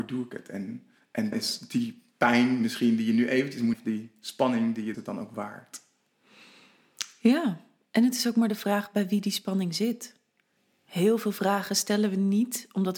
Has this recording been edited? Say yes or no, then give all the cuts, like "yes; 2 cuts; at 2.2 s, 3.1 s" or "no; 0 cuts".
yes; 4 cuts; at 1.3 s, 3.7 s, 4.9 s, 10.6 s